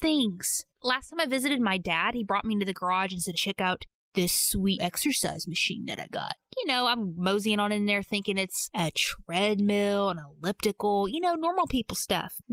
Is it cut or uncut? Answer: cut